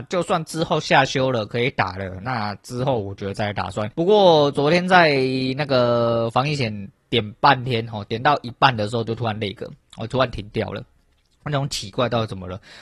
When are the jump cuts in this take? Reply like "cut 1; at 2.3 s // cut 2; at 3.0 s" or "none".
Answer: cut 1; at 3.9 s